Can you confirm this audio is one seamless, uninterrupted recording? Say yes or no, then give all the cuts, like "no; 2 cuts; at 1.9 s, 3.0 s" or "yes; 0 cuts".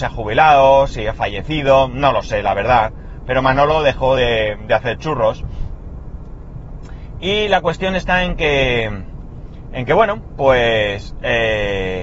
yes; 0 cuts